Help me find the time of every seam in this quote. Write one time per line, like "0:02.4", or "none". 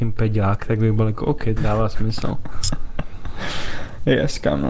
0:01.6